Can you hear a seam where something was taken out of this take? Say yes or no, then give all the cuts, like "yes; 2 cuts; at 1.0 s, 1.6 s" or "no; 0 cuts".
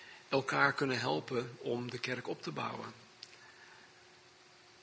no; 0 cuts